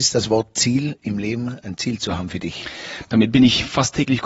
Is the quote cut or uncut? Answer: uncut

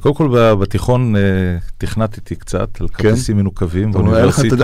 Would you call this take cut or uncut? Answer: uncut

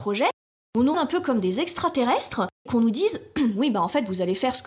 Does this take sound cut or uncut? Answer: cut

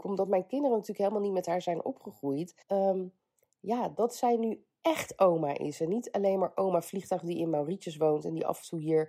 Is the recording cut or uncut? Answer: cut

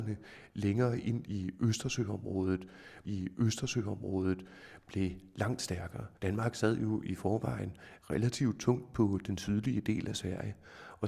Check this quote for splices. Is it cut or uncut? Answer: cut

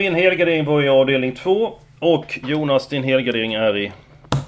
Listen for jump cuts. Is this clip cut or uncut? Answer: uncut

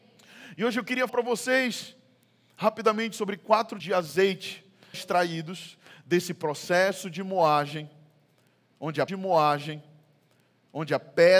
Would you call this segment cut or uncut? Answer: cut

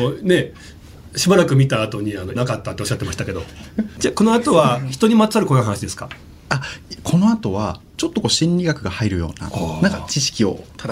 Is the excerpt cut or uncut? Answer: cut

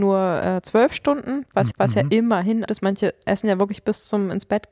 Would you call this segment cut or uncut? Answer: cut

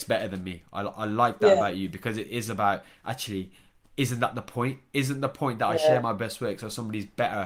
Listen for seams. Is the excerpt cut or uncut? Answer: uncut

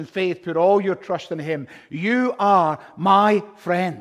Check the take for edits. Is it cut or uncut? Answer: uncut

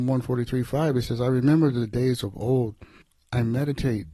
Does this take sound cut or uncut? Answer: uncut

